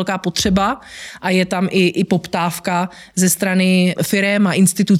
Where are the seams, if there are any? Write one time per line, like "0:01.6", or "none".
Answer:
0:04.0